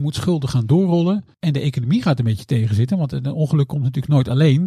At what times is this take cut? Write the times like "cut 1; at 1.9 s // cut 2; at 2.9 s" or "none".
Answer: cut 1; at 1.3 s